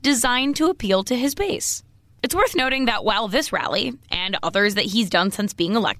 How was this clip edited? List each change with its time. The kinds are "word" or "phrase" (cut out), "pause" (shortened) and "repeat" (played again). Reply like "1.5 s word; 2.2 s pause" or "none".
none